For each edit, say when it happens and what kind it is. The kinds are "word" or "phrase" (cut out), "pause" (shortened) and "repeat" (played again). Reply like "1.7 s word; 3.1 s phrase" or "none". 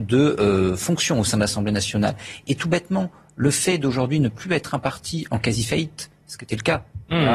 none